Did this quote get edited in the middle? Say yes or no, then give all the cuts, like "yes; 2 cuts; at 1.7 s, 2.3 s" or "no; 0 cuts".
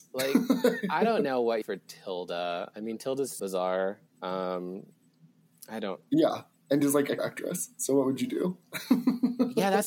yes; 3 cuts; at 1.6 s, 3.4 s, 7.2 s